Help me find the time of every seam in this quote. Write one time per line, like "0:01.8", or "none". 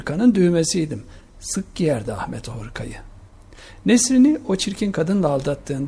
none